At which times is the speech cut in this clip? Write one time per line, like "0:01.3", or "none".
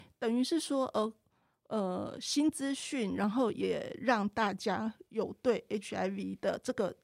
none